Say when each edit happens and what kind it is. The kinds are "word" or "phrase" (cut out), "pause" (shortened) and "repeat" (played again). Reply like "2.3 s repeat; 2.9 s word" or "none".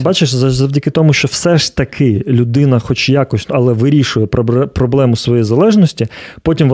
none